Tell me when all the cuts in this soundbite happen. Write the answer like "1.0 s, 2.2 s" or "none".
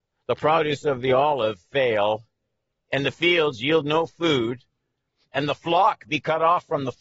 none